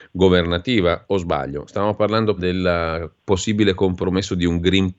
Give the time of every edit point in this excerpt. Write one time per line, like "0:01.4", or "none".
0:02.4